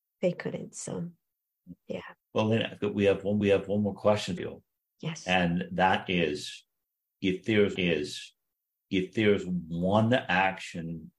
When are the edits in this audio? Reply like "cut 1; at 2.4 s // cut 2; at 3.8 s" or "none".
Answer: cut 1; at 2.2 s // cut 2; at 3.4 s // cut 3; at 4.4 s // cut 4; at 7.8 s